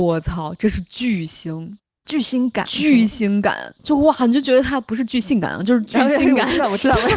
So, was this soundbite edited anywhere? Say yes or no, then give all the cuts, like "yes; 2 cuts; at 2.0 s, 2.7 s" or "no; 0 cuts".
no; 0 cuts